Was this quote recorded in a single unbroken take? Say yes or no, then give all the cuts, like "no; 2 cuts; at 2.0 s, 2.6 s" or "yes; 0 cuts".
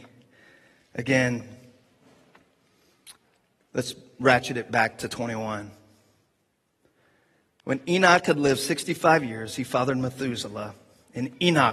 yes; 0 cuts